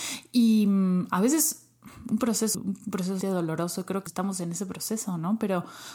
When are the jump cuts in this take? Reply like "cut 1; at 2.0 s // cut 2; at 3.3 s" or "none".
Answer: cut 1; at 2.5 s // cut 2; at 3.2 s // cut 3; at 4.1 s